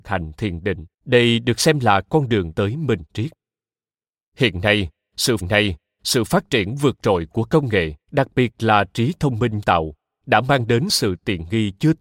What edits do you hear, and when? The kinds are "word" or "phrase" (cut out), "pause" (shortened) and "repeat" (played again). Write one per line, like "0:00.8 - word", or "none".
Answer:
0:00.9 - pause
0:02.5 - word
0:05.4 - repeat
0:08.0 - pause
0:09.6 - word